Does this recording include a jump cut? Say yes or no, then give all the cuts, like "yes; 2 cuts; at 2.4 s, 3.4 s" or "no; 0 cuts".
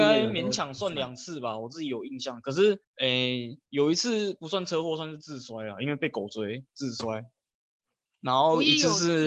yes; 2 cuts; at 2.8 s, 3.6 s